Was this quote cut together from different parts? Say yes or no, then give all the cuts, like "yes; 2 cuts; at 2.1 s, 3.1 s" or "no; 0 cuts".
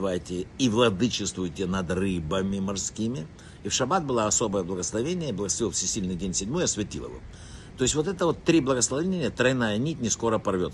no; 0 cuts